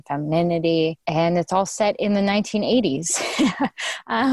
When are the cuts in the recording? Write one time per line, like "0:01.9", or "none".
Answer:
none